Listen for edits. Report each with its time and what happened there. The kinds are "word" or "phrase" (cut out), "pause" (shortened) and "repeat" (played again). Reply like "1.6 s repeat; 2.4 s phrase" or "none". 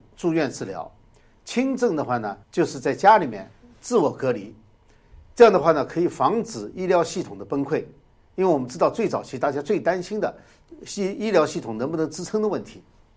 2.4 s pause